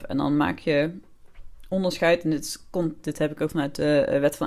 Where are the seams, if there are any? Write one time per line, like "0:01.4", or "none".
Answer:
0:03.5